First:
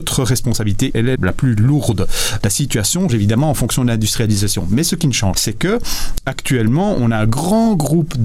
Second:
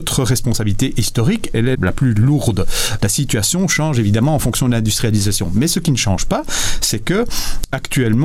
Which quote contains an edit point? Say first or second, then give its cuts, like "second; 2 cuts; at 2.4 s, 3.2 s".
first; 3 cuts; at 0.9 s, 3.1 s, 5.3 s